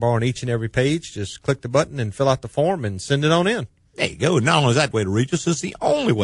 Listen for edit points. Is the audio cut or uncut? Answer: cut